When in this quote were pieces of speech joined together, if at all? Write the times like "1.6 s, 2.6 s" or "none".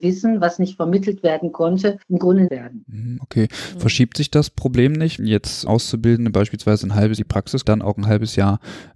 2.0 s, 2.5 s, 5.2 s, 5.7 s, 7.2 s, 7.6 s